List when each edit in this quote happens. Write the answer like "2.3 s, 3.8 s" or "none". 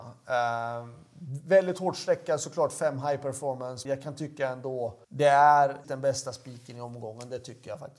3.8 s, 5.0 s, 5.8 s